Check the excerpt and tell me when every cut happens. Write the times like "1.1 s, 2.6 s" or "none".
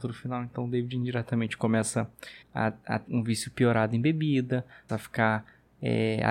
2.4 s, 3.1 s, 4.9 s